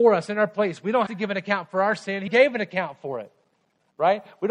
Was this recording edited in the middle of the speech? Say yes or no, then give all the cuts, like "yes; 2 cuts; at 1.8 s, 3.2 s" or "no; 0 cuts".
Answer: yes; 2 cuts; at 1.1 s, 2.3 s